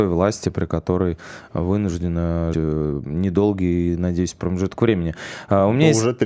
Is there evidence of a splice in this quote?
yes; 1 cut; at 2.5 s

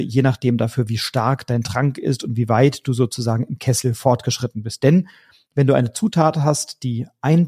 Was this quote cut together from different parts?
no; 0 cuts

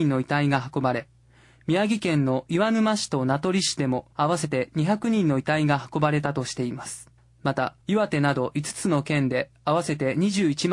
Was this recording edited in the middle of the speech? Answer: yes; 3 cuts; at 4.1 s, 7.2 s, 7.8 s

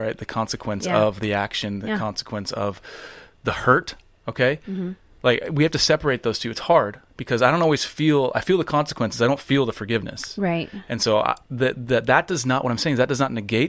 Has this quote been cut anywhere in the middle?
yes; 1 cut; at 7.1 s

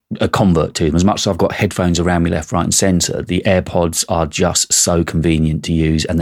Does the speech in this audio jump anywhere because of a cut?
no; 0 cuts

